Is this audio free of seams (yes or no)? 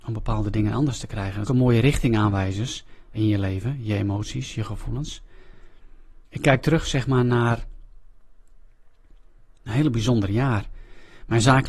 no